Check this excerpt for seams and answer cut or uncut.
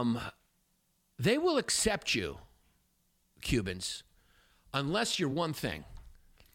uncut